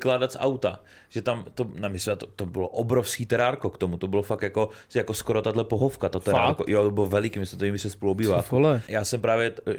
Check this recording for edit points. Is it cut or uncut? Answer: uncut